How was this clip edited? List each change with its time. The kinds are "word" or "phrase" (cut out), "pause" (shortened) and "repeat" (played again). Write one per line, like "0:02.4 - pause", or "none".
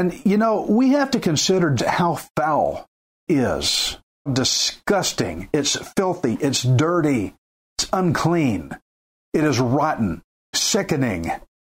0:01.8 - word
0:03.3 - word
0:04.3 - word
0:10.5 - word